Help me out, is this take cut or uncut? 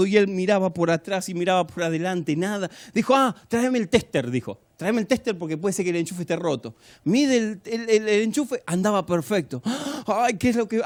uncut